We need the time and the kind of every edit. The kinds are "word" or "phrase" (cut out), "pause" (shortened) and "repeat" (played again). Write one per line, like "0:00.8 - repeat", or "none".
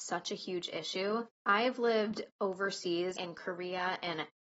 0:01.3 - pause
0:03.2 - phrase